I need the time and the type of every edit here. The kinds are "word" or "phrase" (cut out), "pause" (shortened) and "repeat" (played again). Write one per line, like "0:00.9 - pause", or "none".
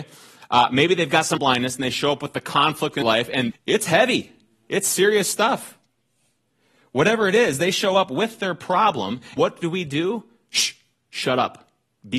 0:01.4 - word
0:03.0 - word
0:03.5 - word
0:09.4 - word